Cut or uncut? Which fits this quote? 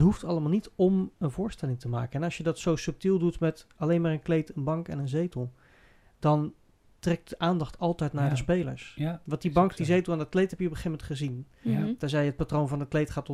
uncut